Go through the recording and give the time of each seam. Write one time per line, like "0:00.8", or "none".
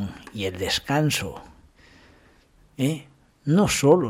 none